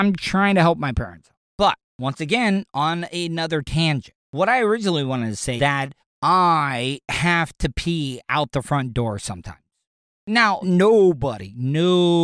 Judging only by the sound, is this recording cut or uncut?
cut